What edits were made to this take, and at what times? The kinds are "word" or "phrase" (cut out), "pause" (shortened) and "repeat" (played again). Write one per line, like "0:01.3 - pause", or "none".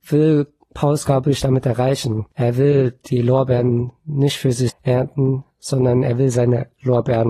0:02.3 - pause
0:04.7 - word